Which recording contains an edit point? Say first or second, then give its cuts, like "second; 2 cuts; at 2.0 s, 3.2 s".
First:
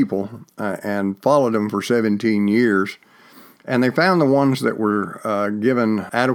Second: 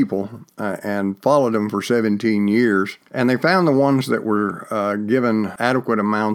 second; 1 cut; at 3.0 s